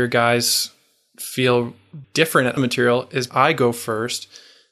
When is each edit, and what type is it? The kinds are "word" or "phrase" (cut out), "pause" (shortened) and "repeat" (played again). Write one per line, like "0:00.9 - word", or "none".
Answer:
0:02.0 - word
0:02.6 - word
0:03.3 - word